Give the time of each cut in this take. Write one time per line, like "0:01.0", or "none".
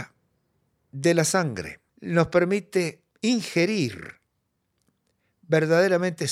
0:01.9
0:03.1

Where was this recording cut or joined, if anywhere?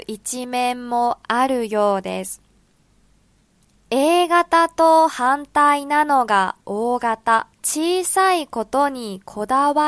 0:07.5

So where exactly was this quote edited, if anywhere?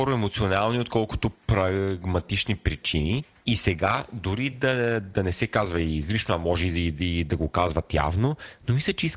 none

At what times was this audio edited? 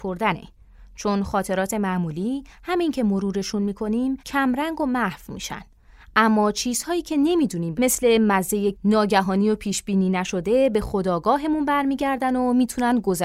0:04.2
0:07.7
0:08.7

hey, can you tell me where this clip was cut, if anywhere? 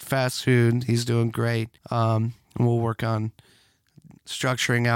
0:01.8

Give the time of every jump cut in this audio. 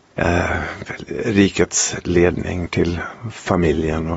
0:02.7

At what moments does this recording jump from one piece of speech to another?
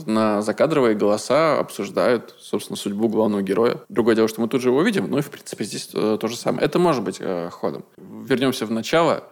0:03.8

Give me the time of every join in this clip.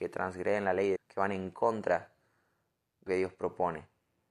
0:01.0
0:03.1

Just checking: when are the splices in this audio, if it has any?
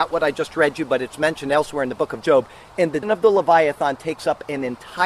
0:03.0

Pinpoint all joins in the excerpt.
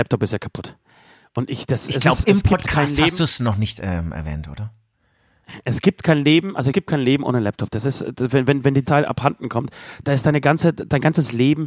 0:06.7
0:08.8
0:10.0

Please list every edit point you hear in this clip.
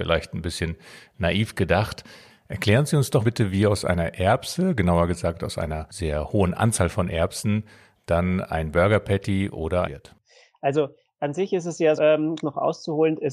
0:03.2
0:09.8
0:12.0
0:12.4

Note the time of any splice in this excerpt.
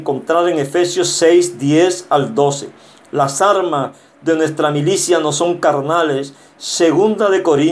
none

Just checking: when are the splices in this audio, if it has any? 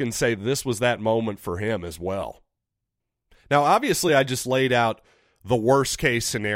none

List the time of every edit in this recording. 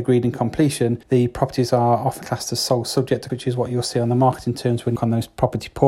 0:01.0
0:02.2
0:03.3
0:05.0

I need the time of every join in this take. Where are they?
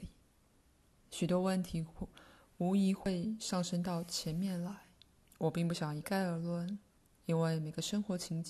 0:05.2
0:06.9

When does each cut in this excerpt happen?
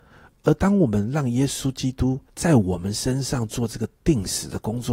0:02.3

